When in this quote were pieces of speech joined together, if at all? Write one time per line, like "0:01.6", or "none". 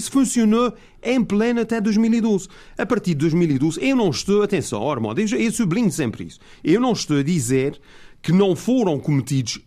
none